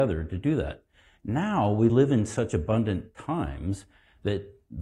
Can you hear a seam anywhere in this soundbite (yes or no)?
no